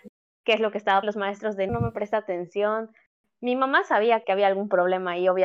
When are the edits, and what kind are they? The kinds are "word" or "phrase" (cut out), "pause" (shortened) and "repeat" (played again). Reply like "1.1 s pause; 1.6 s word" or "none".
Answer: 1.0 s word; 1.7 s word; 4.2 s word